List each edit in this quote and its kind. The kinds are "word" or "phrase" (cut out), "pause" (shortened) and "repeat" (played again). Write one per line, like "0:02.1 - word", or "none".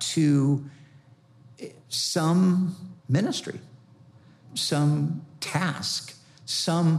0:03.0 - pause